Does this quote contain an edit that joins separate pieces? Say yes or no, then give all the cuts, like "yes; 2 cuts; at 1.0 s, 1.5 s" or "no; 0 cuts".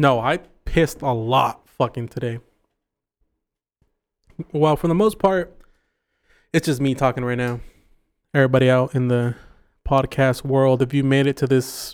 no; 0 cuts